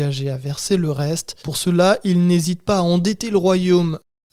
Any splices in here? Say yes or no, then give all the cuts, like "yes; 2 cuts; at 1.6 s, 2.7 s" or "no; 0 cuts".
yes; 1 cut; at 1.4 s